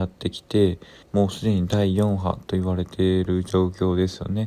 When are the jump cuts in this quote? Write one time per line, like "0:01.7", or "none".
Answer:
0:01.0